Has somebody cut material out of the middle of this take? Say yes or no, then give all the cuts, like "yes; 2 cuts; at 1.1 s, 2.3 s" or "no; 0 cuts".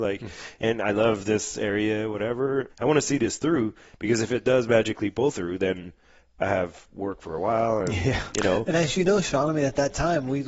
no; 0 cuts